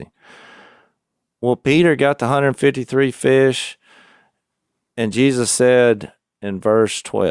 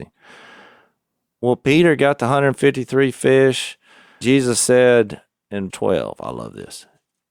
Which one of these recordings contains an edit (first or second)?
second